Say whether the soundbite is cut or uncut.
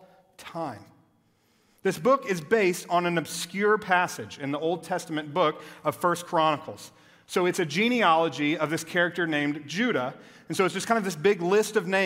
uncut